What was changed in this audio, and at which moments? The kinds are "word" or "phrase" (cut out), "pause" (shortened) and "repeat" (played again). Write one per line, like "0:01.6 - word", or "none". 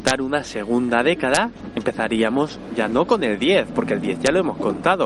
none